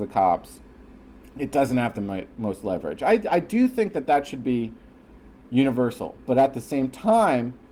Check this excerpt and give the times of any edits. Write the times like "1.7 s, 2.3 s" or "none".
none